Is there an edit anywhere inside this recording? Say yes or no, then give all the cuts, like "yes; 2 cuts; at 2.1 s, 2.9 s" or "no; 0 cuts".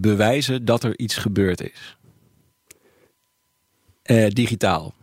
no; 0 cuts